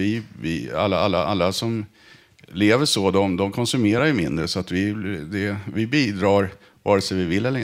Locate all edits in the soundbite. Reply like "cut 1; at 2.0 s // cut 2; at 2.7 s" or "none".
none